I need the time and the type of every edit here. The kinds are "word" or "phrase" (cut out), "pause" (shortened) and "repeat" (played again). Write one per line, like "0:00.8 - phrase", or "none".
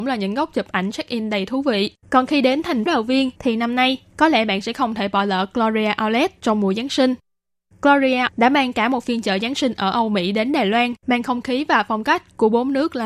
0:02.0 - pause
0:02.9 - word
0:03.4 - pause
0:08.3 - word
0:11.0 - pause